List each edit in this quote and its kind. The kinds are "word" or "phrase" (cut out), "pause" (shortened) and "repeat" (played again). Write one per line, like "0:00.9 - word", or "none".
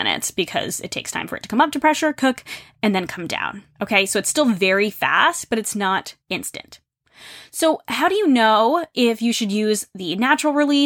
0:06.2 - pause